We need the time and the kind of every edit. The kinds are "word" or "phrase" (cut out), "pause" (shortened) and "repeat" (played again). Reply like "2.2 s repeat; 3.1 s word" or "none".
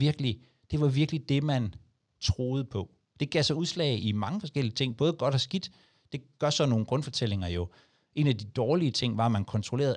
none